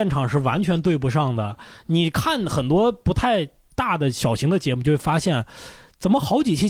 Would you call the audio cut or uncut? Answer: uncut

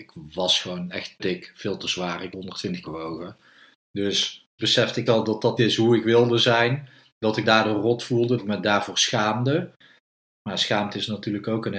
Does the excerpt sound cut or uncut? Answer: cut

